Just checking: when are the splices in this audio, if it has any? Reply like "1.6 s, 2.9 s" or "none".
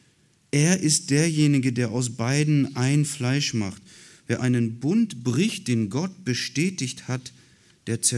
4.4 s